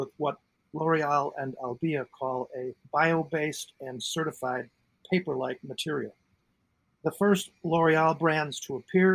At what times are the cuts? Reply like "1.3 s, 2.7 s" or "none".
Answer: 2.8 s